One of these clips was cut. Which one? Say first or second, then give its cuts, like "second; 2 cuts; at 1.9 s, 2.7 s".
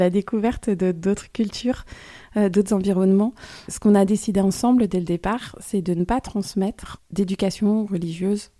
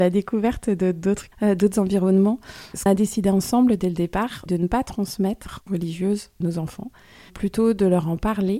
second; 5 cuts; at 1.3 s, 2.9 s, 4.5 s, 5.7 s, 6.4 s